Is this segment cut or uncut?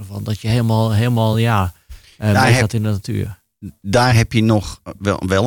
uncut